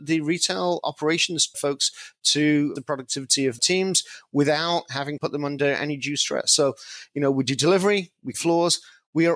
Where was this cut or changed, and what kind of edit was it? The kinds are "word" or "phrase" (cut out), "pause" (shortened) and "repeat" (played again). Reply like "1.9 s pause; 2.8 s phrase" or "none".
1.5 s word; 2.8 s word; 3.6 s word; 5.2 s word; 8.3 s word